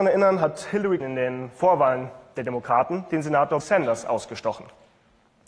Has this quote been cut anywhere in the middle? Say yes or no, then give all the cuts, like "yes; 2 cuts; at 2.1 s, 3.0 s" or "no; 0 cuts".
yes; 2 cuts; at 1.0 s, 3.6 s